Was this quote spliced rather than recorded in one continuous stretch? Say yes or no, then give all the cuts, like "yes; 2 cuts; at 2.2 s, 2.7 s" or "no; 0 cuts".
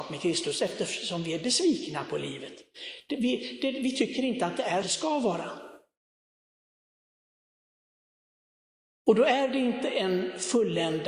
yes; 1 cut; at 4.8 s